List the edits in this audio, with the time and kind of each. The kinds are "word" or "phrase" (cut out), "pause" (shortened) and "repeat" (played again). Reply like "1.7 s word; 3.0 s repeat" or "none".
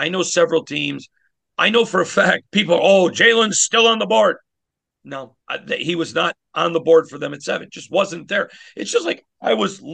2.5 s pause; 5.4 s pause